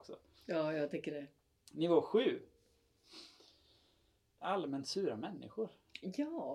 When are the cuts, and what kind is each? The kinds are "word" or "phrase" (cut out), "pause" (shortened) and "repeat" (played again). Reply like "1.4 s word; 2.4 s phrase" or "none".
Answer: none